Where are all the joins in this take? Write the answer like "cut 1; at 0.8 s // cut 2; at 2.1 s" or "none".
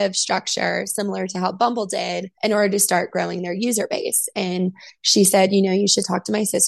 cut 1; at 2.3 s